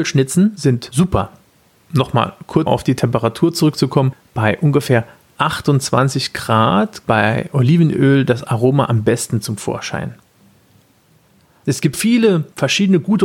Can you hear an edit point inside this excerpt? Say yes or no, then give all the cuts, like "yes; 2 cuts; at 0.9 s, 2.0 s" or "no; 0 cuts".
yes; 3 cuts; at 2.7 s, 7.0 s, 11.9 s